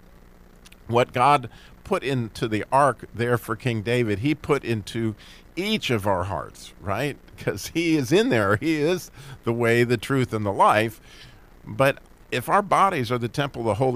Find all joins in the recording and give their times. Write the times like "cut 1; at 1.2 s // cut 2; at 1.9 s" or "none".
none